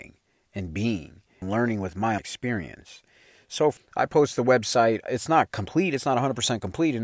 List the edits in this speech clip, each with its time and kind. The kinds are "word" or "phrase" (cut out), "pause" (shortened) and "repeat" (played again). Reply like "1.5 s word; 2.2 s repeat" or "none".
1.4 s word; 2.2 s word; 3.8 s word

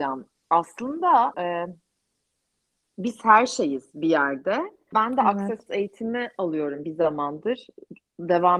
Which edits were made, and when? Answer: 1.3 s word; 4.9 s word; 5.7 s word; 6.8 s word

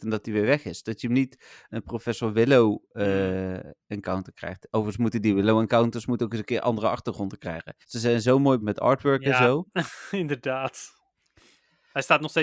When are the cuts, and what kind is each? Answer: 1.7 s word; 7.8 s pause; 8.6 s word

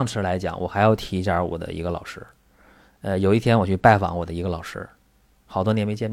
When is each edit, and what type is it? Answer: none

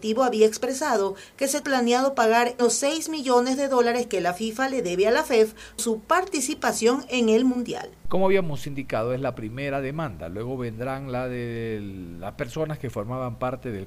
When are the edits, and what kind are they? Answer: 1.6 s word; 2.6 s phrase; 5.8 s word; 8.0 s pause

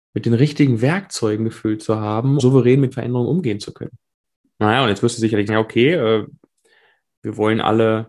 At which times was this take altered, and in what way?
2.4 s word; 2.9 s word; 5.5 s word

